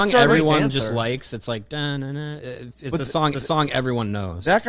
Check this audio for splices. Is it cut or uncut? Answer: cut